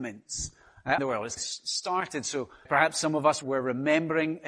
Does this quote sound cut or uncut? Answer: cut